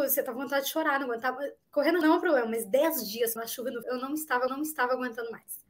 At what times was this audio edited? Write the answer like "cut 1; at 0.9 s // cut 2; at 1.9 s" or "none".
cut 1; at 2.0 s // cut 2; at 3.4 s // cut 3; at 3.8 s // cut 4; at 4.5 s